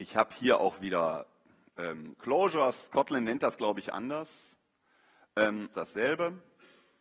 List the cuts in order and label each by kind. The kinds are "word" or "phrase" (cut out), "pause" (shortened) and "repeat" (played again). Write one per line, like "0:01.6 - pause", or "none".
0:05.7 - phrase